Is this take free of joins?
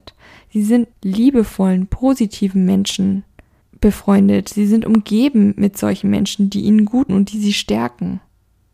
no; 2 cuts; at 0.9 s, 7.1 s

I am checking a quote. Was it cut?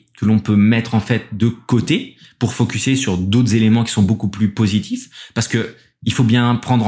no; 0 cuts

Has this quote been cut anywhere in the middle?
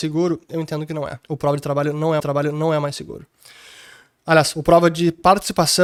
yes; 2 cuts; at 1.2 s, 2.2 s

